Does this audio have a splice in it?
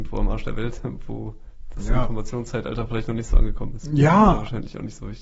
no; 0 cuts

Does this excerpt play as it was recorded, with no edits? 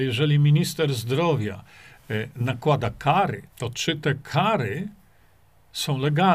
no; 1 cut; at 3.5 s

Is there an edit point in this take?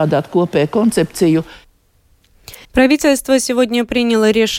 yes; 1 cut; at 2.6 s

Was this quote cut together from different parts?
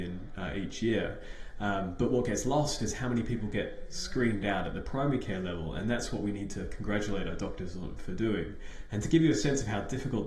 no; 0 cuts

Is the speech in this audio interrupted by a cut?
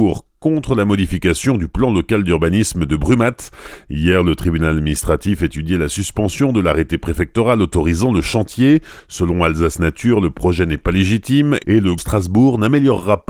yes; 1 cut; at 12.0 s

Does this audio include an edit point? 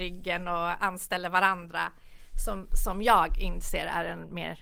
no; 0 cuts

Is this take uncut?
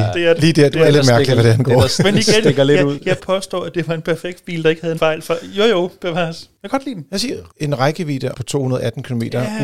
no; 4 cuts; at 3.2 s, 5.0 s, 7.5 s, 8.3 s

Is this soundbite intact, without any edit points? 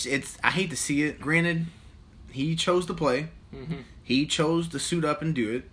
no; 1 cut; at 1.2 s

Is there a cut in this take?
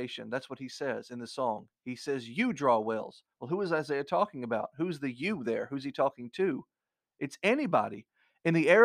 no; 0 cuts

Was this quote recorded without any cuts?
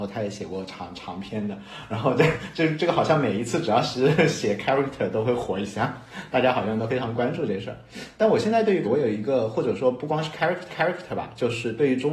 no; 2 cuts; at 8.8 s, 10.7 s

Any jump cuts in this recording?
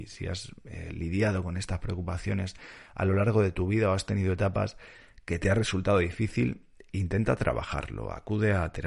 no; 0 cuts

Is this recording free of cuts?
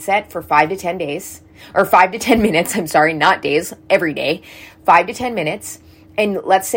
yes; 0 cuts

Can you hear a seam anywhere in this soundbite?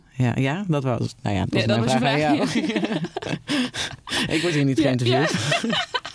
no; 0 cuts

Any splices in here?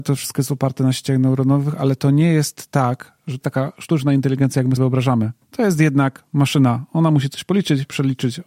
yes; 3 cuts; at 3.4 s, 4.8 s, 5.4 s

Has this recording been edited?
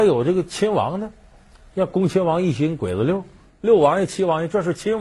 no; 0 cuts

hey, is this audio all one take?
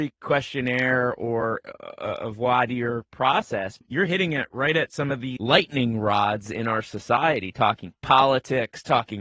yes; 0 cuts

